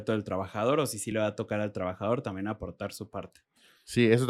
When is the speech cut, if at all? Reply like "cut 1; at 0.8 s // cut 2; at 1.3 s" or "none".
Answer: none